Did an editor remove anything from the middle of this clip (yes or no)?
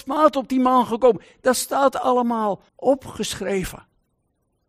yes